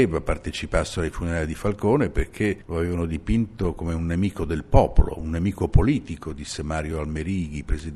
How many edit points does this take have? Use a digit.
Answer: 0